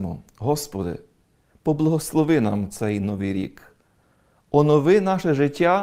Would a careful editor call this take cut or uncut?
uncut